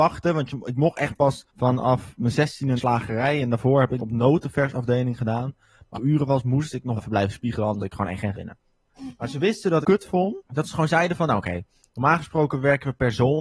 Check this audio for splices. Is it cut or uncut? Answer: cut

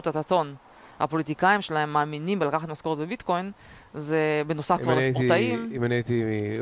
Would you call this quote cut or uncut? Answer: uncut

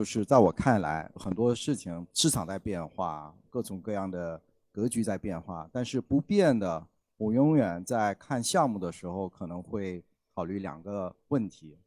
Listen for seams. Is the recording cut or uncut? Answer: uncut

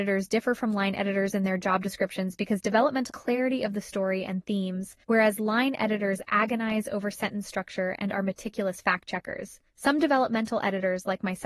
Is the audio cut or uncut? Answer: cut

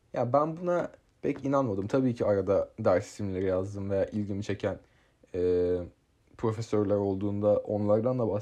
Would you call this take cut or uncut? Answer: uncut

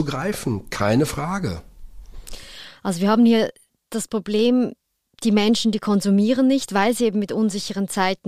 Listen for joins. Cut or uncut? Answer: uncut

